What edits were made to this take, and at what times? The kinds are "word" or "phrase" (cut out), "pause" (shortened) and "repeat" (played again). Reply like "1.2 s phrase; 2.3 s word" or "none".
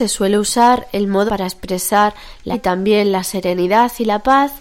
1.3 s word; 2.5 s word